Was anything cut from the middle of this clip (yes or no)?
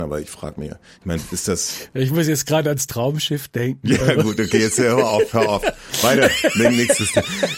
no